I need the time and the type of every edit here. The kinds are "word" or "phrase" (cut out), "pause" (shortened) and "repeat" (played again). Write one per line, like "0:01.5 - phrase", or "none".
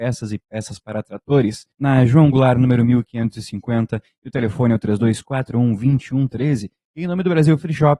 0:01.7 - pause